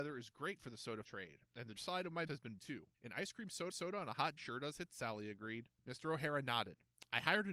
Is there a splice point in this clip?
yes; 9 cuts; at 1.0 s, 1.8 s, 2.3 s, 2.6 s, 2.9 s, 3.7 s, 4.4 s, 4.9 s, 5.8 s

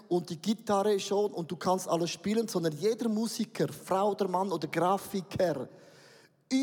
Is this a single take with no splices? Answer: yes; 0 cuts

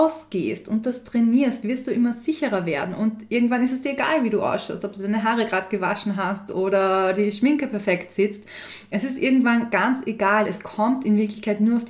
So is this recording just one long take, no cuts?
yes; 0 cuts

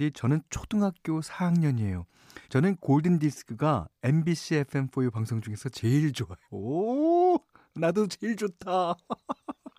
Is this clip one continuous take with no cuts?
no; 2 cuts; at 2.4 s, 6.4 s

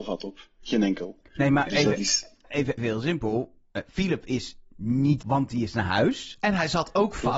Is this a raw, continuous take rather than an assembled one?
no; 3 cuts; at 1.7 s, 2.8 s, 5.2 s

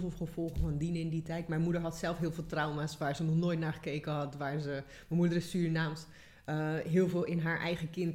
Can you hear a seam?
no; 0 cuts

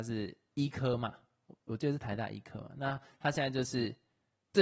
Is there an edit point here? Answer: no; 0 cuts

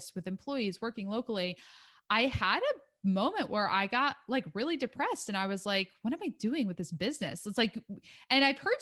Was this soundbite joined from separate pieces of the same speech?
no; 0 cuts

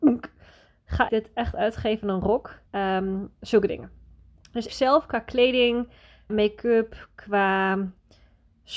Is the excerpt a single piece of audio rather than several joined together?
no; 4 cuts; at 1.1 s, 2.7 s, 4.7 s, 6.3 s

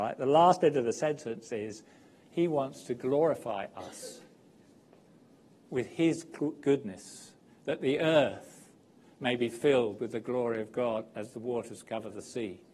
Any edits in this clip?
no; 0 cuts

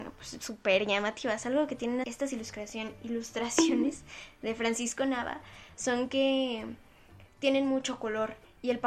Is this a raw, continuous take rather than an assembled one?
no; 1 cut; at 2.0 s

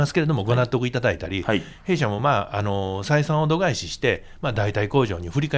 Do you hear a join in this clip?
no; 0 cuts

